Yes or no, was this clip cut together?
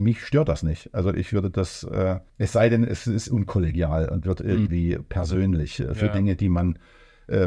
yes